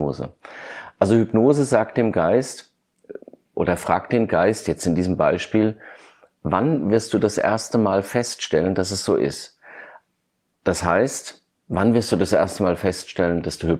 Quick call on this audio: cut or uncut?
uncut